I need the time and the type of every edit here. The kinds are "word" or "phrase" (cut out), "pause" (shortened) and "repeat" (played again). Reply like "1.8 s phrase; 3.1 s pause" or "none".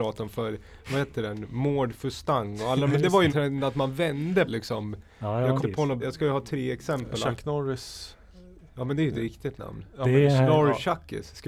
3.3 s word; 4.5 s word; 5.6 s word; 6.0 s word